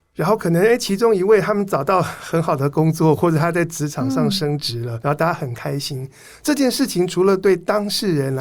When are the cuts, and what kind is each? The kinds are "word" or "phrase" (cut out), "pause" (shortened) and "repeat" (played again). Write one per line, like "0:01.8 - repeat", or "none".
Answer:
0:05.0 - word